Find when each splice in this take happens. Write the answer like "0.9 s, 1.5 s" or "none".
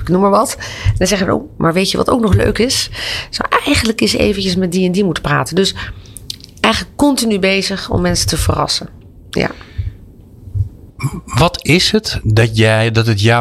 none